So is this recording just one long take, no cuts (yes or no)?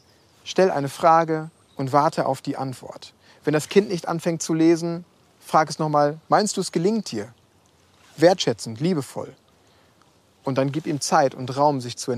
yes